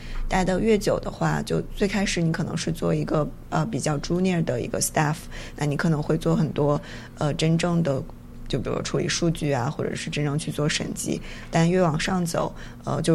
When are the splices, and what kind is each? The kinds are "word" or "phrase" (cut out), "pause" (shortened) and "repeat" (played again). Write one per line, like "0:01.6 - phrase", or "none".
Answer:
none